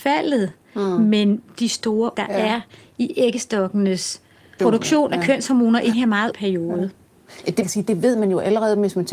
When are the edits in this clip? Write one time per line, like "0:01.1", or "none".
0:02.1
0:04.6
0:05.9
0:06.3
0:07.6